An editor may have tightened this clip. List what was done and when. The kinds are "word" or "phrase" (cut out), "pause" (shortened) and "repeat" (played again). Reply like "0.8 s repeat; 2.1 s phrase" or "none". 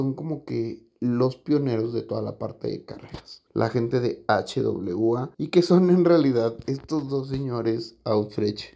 3.5 s pause; 5.3 s pause